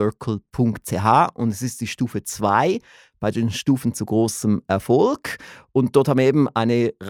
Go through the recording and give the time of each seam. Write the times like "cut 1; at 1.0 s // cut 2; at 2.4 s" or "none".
none